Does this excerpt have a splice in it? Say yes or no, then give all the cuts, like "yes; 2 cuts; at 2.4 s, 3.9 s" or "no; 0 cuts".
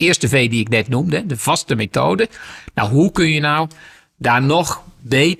no; 0 cuts